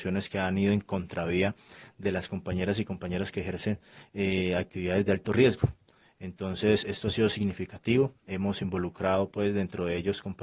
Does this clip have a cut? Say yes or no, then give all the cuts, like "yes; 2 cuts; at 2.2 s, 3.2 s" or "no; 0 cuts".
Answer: no; 0 cuts